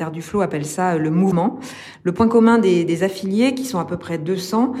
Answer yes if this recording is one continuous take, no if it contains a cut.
yes